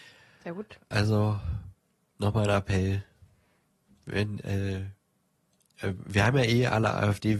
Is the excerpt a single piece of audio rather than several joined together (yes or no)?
yes